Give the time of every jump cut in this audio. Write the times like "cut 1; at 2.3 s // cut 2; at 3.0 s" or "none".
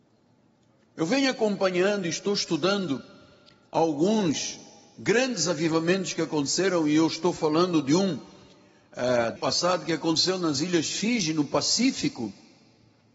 cut 1; at 9.4 s